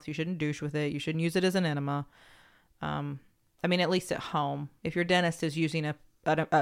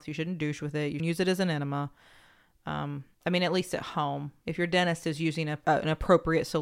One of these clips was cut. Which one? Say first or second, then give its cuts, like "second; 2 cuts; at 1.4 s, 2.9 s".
second; 3 cuts; at 1.0 s, 3.1 s, 5.6 s